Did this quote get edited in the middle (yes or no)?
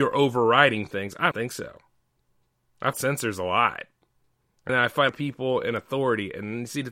yes